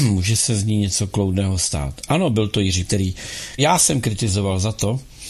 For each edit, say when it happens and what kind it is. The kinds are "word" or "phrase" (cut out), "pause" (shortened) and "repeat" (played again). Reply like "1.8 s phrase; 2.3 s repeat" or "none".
2.9 s word; 3.6 s word